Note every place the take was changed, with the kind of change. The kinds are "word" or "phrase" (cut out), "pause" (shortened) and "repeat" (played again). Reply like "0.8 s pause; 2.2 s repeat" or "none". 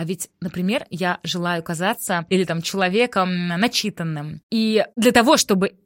2.3 s phrase